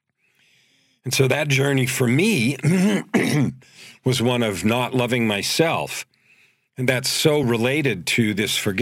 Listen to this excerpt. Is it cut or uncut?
uncut